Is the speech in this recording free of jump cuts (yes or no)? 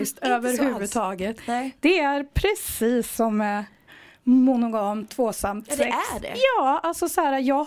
yes